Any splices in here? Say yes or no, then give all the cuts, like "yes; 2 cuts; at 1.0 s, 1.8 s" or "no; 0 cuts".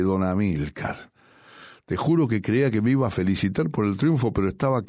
no; 0 cuts